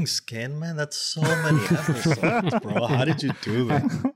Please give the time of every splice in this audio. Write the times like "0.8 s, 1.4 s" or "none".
none